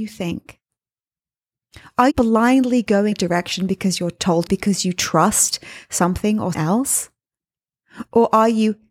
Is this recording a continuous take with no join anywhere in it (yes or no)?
no